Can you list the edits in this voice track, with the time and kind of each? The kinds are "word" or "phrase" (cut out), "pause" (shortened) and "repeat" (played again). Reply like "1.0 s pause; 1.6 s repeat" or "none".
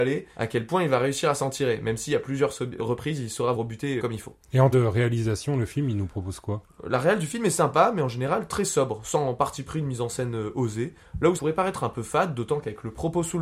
2.8 s word; 3.5 s word; 4.0 s word; 4.7 s word; 11.4 s word